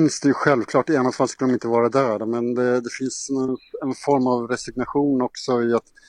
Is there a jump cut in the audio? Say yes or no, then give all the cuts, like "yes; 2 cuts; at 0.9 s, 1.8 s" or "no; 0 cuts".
no; 0 cuts